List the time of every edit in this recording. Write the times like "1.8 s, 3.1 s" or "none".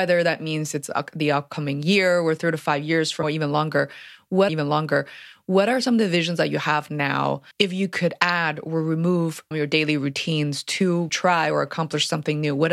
3.2 s, 4.5 s, 7.5 s, 9.5 s, 11.1 s